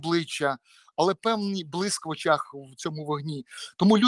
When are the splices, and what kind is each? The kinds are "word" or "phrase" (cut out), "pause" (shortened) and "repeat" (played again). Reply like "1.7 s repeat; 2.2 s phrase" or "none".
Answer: none